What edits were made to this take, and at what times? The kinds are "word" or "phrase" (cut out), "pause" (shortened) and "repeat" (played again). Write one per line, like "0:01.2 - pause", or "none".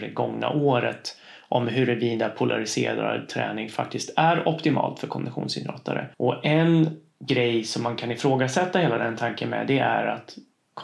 0:06.1 - pause

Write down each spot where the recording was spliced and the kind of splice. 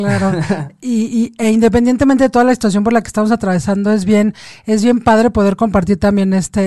none

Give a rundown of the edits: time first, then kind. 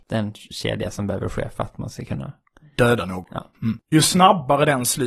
none

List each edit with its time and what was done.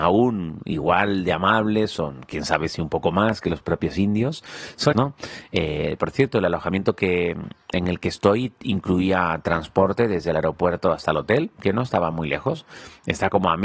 0:04.9 - word

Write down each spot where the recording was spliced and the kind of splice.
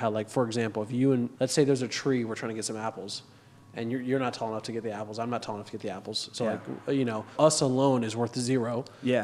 0:01.3 - word
0:07.3 - word

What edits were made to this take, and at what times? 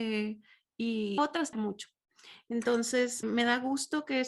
0:01.2 - phrase
0:01.5 - phrase
0:03.2 - word

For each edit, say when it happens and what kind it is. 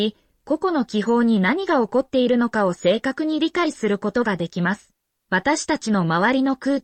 0:05.0 - pause

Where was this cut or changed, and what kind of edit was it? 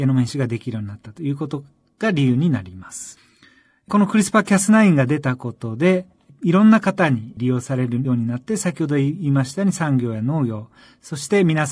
none

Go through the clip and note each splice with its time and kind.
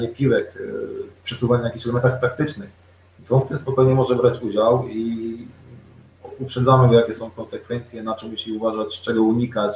none

